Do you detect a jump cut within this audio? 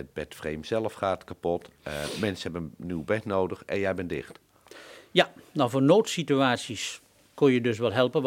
no; 0 cuts

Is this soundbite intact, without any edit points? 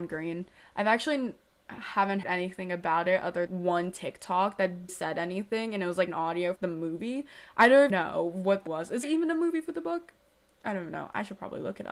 no; 8 cuts; at 2.2 s, 3.5 s, 4.9 s, 6.1 s, 6.6 s, 7.9 s, 8.7 s, 9.0 s

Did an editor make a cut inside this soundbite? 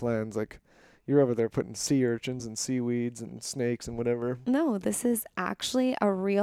no; 0 cuts

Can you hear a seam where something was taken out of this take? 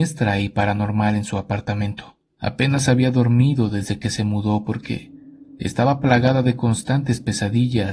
no; 0 cuts

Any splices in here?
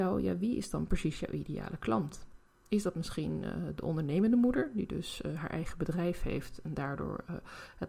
no; 0 cuts

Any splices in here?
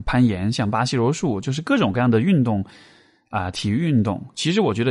no; 0 cuts

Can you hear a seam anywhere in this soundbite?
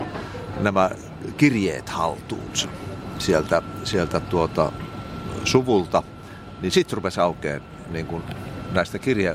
no; 0 cuts

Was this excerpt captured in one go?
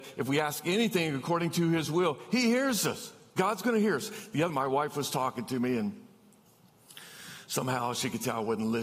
no; 1 cut; at 4.5 s

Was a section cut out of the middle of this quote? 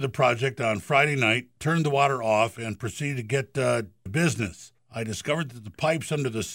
yes; 2 cuts; at 4.1 s, 4.8 s

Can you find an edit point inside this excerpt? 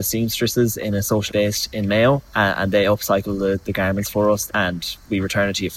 yes; 4 cuts; at 1.3 s, 2.3 s, 3.6 s, 4.5 s

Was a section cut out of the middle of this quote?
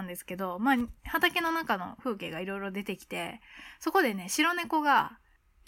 no; 0 cuts

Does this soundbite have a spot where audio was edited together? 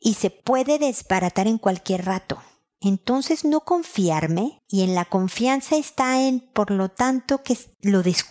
no; 0 cuts

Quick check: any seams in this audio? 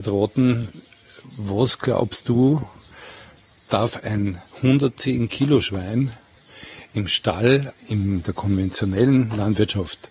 yes; 2 cuts; at 4.5 s, 7.7 s

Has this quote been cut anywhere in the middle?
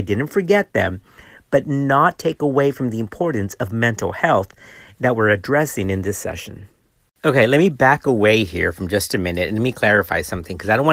no; 0 cuts

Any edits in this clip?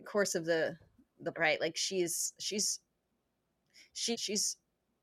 yes; 2 cuts; at 1.3 s, 4.1 s

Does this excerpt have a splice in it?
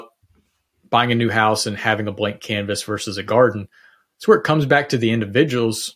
no; 0 cuts

